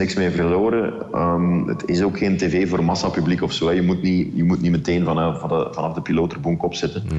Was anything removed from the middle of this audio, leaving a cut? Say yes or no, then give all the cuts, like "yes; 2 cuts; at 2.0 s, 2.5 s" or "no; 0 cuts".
no; 0 cuts